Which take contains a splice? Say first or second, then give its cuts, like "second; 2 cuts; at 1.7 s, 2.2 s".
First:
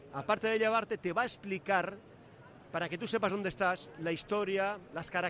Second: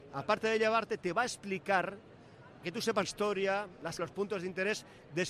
second; 3 cuts; at 2.6 s, 3.0 s, 4.0 s